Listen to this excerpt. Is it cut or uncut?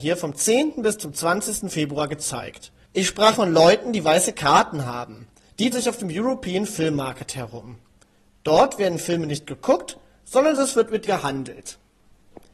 cut